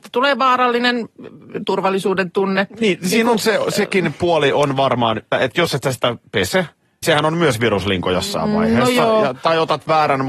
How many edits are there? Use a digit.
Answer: 2